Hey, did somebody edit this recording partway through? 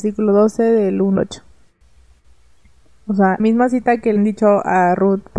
yes; 3 cuts; at 1.2 s, 3.4 s, 4.2 s

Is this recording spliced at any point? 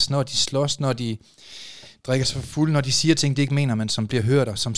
no; 0 cuts

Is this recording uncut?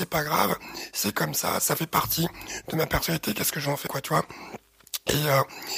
no; 1 cut; at 3.9 s

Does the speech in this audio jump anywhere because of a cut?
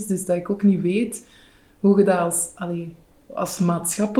no; 0 cuts

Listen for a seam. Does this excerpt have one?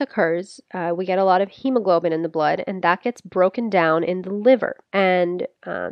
yes; 1 cut; at 4.9 s

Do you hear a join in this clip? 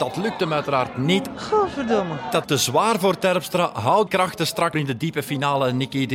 yes; 3 cuts; at 2.4 s, 4.1 s, 4.7 s

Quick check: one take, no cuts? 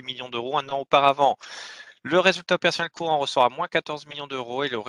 yes; 0 cuts

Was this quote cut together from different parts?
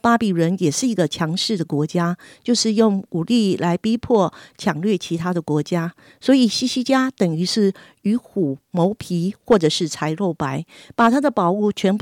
no; 0 cuts

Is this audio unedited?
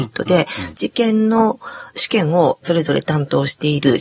yes; 0 cuts

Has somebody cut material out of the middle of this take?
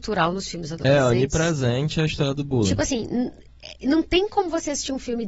yes; 1 cut; at 3.8 s

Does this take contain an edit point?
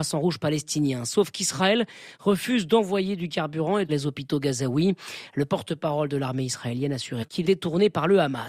yes; 2 cuts; at 3.9 s, 7.4 s

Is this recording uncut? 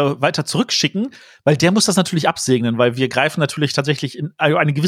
yes; 0 cuts

